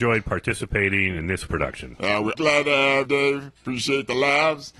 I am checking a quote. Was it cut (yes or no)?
yes